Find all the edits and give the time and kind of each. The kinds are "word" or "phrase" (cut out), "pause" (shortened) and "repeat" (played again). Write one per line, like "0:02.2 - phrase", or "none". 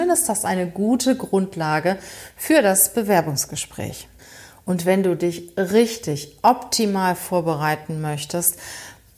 none